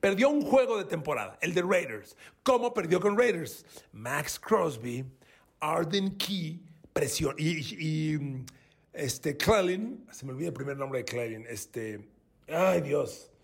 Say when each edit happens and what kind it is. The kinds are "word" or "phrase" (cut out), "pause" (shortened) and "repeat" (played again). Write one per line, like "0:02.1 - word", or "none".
none